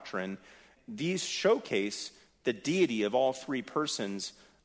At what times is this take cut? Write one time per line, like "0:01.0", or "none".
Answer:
none